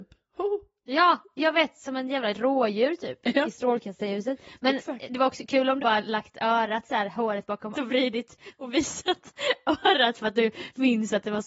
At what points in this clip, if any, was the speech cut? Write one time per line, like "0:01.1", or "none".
0:05.8
0:07.7